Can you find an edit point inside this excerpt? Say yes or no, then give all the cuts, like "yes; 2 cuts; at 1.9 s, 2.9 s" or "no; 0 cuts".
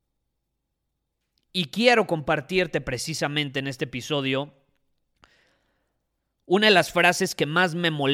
no; 0 cuts